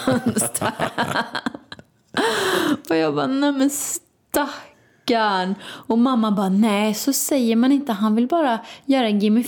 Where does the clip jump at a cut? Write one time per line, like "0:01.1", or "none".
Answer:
none